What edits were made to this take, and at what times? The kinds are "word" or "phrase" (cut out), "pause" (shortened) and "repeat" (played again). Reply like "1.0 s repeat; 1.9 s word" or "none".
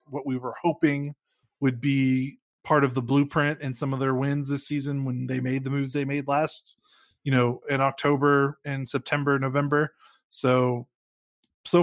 7.6 s word